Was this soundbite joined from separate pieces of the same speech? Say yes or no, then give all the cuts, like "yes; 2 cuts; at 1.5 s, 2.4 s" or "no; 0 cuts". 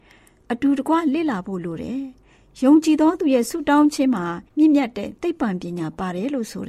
yes; 1 cut; at 4.5 s